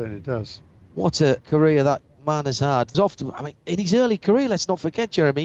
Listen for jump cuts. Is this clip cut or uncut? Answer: cut